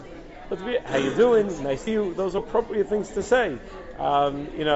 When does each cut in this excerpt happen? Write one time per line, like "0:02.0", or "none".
0:01.9
0:02.4